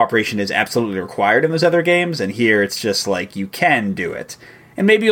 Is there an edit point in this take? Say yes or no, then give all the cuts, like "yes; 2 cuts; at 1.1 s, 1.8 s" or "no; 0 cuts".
no; 0 cuts